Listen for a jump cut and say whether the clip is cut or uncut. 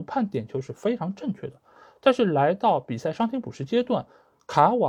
uncut